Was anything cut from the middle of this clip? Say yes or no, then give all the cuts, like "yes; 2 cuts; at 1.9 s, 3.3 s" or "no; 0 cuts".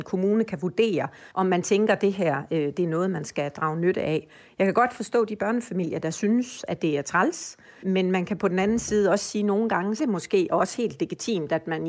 yes; 3 cuts; at 1.3 s, 7.8 s, 10.0 s